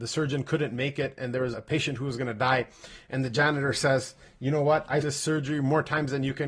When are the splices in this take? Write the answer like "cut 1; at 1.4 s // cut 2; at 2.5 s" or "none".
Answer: cut 1; at 1.5 s // cut 2; at 5.0 s